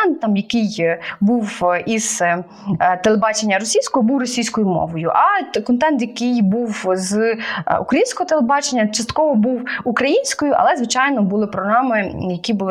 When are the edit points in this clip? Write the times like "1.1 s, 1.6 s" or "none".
none